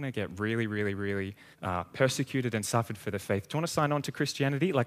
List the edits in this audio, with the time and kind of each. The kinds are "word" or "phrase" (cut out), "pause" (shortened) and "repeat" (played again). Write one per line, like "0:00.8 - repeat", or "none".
0:01.5 - pause